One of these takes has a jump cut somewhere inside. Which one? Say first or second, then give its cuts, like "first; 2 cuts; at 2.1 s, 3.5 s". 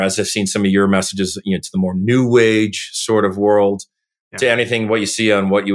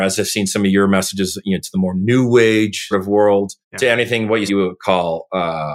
second; 3 cuts; at 2.9 s, 3.6 s, 4.5 s